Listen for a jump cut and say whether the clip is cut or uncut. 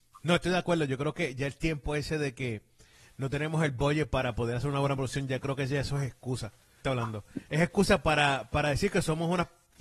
cut